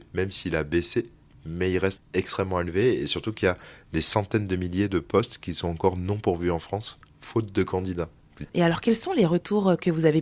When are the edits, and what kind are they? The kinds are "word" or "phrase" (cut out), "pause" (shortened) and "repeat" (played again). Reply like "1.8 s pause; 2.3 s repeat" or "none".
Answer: 2.0 s word; 8.4 s word